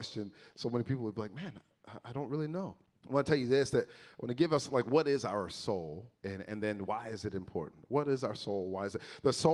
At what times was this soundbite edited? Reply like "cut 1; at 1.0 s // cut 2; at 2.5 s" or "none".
cut 1; at 2.8 s // cut 2; at 6.2 s